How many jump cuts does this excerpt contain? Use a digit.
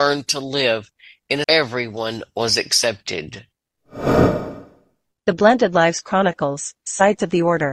1